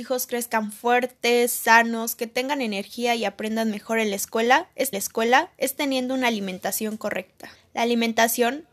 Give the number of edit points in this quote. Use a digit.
2